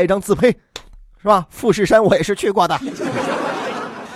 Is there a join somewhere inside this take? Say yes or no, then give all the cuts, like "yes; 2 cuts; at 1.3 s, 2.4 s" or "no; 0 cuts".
no; 0 cuts